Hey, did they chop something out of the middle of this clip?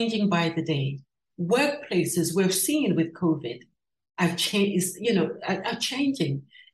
no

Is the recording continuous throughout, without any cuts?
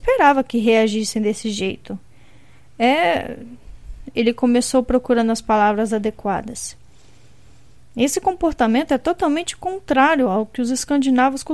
yes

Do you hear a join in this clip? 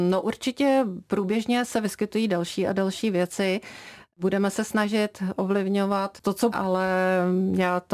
yes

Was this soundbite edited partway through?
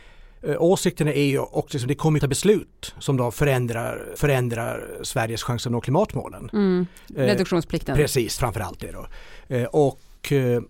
yes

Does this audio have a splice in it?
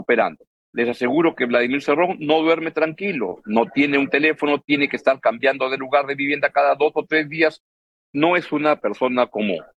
no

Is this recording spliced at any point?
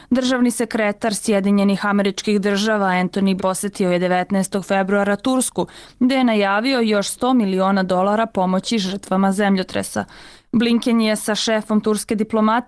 yes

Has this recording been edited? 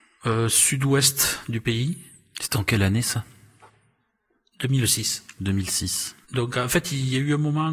yes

